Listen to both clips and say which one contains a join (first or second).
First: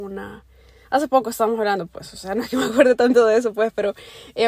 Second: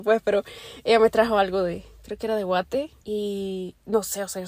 second